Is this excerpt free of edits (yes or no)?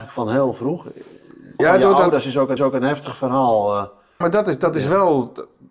no